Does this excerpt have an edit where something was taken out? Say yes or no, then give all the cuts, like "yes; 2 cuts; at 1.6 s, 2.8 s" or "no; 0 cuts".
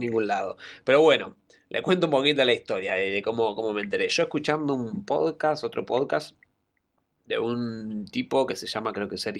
no; 0 cuts